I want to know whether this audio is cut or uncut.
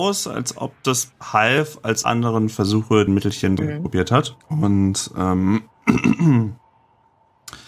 cut